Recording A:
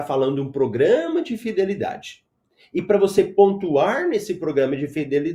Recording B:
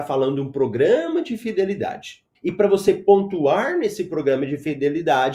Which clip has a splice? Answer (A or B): B